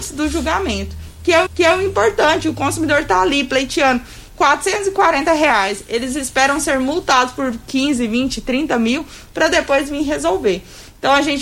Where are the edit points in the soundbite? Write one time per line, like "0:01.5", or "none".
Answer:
0:01.5

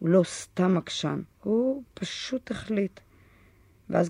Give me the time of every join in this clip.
0:01.3

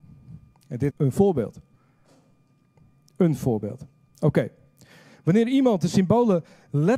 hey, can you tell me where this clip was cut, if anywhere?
0:00.9

